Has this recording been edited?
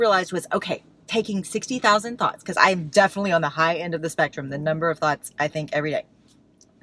no; 0 cuts

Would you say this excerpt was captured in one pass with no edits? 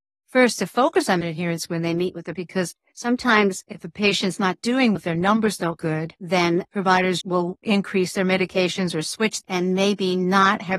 no; 6 cuts; at 1.2 s, 2.3 s, 5.0 s, 5.8 s, 7.2 s, 9.4 s

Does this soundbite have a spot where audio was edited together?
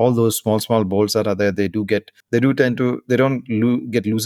yes; 1 cut; at 2.2 s

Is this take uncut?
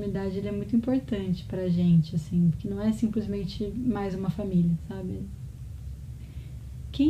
yes; 0 cuts

